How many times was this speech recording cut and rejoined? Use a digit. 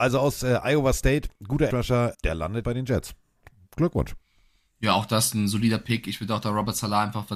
3